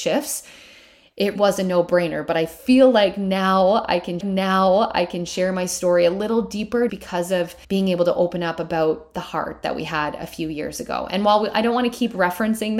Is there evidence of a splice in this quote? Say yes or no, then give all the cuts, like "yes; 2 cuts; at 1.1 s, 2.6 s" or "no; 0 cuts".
yes; 4 cuts; at 1.4 s, 4.2 s, 6.9 s, 7.6 s